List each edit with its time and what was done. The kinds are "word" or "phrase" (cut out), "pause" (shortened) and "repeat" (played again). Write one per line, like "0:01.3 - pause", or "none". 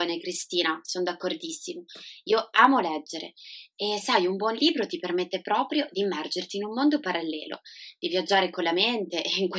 none